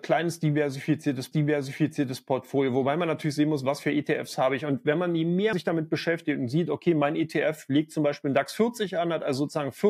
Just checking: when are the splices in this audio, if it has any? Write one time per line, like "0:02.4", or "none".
0:01.3
0:05.5